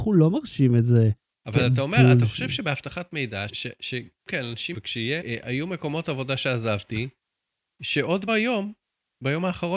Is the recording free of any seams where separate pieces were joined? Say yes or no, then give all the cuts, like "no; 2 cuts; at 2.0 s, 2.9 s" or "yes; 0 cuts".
no; 5 cuts; at 3.5 s, 4.3 s, 4.7 s, 5.2 s, 8.3 s